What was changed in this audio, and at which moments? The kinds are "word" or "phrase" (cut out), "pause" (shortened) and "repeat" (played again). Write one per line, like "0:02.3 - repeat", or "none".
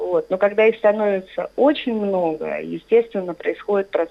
none